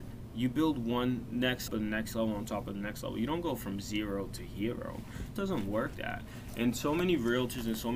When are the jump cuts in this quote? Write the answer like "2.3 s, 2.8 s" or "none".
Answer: 1.7 s, 5.4 s, 5.9 s